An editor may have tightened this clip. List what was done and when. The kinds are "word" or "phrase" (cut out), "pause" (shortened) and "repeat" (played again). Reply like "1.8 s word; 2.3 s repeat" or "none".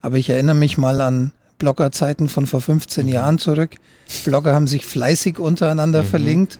none